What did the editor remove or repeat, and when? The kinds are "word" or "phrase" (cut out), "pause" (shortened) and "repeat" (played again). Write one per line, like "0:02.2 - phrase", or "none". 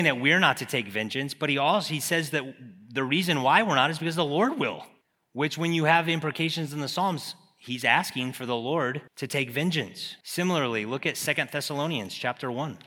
0:05.0 - pause
0:09.1 - pause
0:10.2 - pause